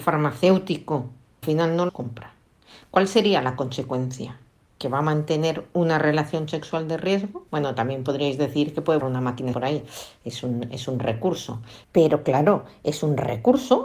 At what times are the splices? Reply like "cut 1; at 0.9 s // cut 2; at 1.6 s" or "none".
cut 1; at 1.4 s // cut 2; at 1.9 s // cut 3; at 7.5 s // cut 4; at 9.0 s // cut 5; at 9.5 s // cut 6; at 11.8 s